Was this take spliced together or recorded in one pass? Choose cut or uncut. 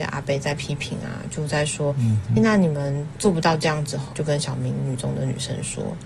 cut